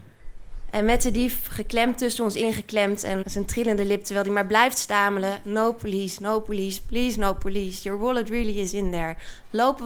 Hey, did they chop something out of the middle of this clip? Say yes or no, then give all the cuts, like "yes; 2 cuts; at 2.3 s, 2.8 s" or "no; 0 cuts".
yes; 1 cut; at 3.2 s